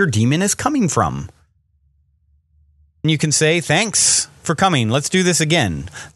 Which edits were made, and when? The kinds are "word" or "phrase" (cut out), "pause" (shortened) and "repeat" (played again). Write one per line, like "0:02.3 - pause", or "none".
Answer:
0:03.0 - word